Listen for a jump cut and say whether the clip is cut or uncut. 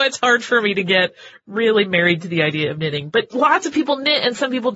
uncut